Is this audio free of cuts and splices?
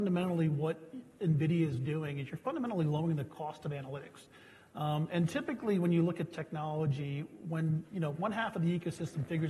yes; 0 cuts

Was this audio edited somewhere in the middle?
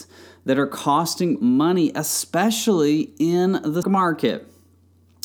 yes; 2 cuts; at 1.4 s, 3.8 s

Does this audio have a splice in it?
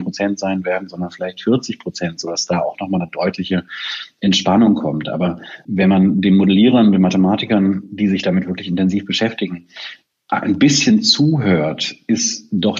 no; 0 cuts

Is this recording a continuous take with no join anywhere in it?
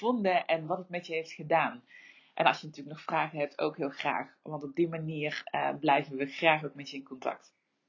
yes; 0 cuts

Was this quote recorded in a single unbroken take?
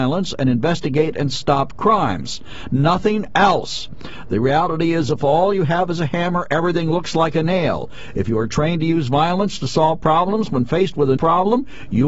no; 1 cut; at 11.2 s

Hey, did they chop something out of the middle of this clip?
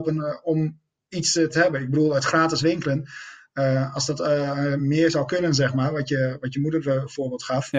no; 0 cuts

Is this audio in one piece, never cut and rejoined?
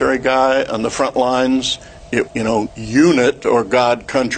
no; 2 cuts; at 2.3 s, 2.7 s

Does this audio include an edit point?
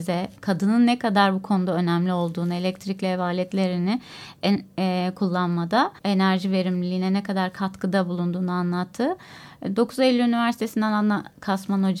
yes; 1 cut; at 6.0 s

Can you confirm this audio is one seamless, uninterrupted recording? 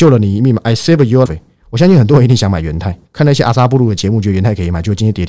no; 2 cuts; at 1.3 s, 3.1 s

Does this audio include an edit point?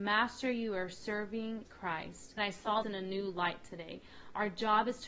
yes; 3 cuts; at 1.7 s, 2.4 s, 2.8 s

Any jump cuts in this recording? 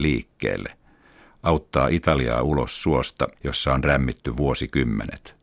yes; 1 cut; at 3.4 s

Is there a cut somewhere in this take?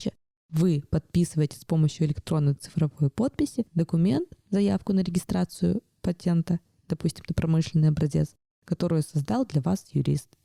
no; 0 cuts

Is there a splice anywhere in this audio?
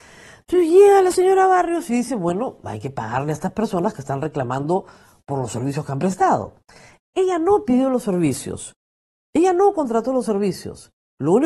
no; 0 cuts

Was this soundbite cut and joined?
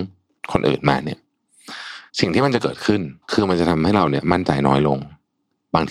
yes; 2 cuts; at 2.1 s, 3.2 s

